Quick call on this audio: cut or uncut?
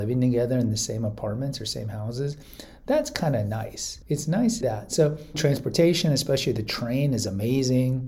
cut